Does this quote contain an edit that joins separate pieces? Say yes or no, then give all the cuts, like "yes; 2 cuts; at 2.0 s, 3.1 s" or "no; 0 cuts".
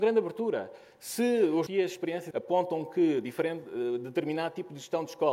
yes; 2 cuts; at 1.7 s, 2.3 s